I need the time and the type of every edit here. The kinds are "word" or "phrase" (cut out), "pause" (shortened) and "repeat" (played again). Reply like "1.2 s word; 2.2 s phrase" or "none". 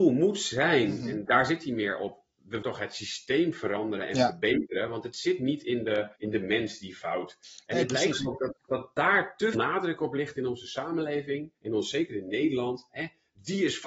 1.3 s word; 2.6 s word; 6.1 s pause; 9.5 s word; 11.6 s pause